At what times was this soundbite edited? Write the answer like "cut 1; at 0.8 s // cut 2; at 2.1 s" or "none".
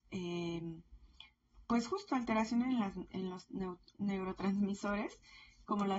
none

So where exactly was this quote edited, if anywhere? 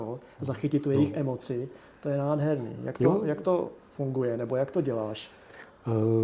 none

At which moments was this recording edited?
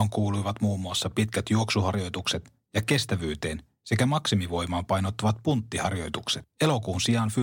none

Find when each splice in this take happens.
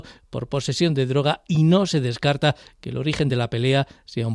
none

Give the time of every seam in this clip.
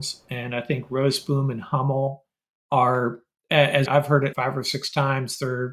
cut 1; at 3.9 s // cut 2; at 4.3 s

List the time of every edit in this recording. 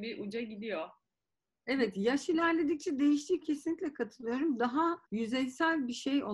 cut 1; at 3.4 s // cut 2; at 5.0 s

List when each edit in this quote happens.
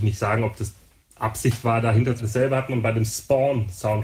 cut 1; at 2.2 s

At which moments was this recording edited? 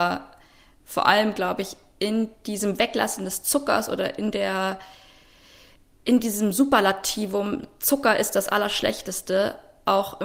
none

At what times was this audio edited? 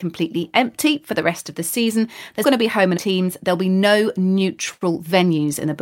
cut 1; at 2.4 s // cut 2; at 3.0 s

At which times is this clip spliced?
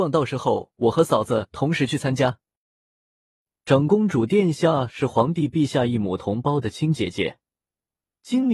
none

